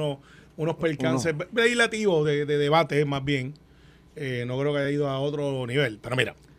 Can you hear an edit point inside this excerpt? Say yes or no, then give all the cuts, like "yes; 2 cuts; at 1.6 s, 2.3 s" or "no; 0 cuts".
no; 0 cuts